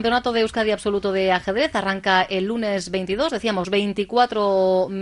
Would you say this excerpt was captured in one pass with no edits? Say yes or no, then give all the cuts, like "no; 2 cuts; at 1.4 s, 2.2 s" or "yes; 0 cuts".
no; 1 cut; at 3.6 s